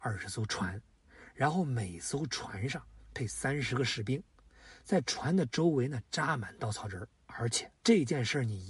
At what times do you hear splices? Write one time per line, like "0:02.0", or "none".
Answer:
0:07.2
0:07.8